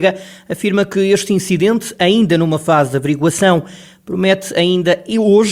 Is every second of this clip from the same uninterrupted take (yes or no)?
yes